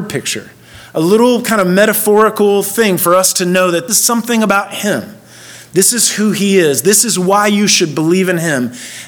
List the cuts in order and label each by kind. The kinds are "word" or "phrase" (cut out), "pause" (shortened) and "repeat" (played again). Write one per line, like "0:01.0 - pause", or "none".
0:03.9 - word